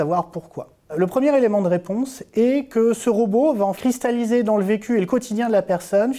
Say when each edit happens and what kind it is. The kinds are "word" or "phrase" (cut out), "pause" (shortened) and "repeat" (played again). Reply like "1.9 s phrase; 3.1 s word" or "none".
3.7 s word